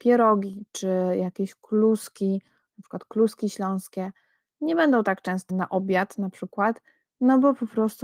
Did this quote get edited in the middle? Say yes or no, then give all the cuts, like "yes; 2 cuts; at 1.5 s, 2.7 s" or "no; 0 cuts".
yes; 1 cut; at 5.5 s